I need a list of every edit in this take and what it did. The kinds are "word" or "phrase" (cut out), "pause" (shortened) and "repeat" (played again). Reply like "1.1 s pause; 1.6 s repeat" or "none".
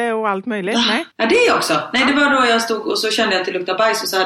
1.1 s pause